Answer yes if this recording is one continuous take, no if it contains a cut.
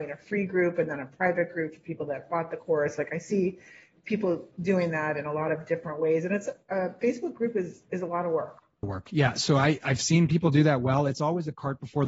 yes